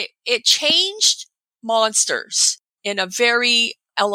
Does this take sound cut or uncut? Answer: uncut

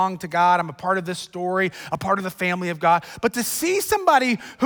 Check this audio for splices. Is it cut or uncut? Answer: uncut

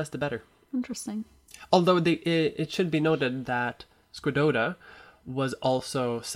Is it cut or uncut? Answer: uncut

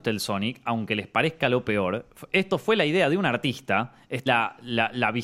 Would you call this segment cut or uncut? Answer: cut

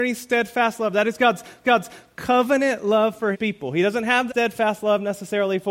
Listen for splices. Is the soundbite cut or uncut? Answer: cut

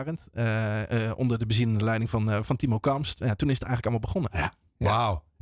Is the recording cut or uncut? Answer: uncut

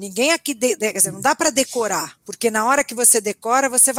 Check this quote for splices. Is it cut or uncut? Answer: cut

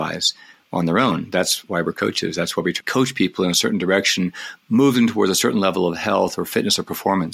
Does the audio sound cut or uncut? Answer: cut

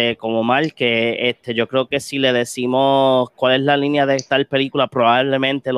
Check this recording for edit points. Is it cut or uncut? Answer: uncut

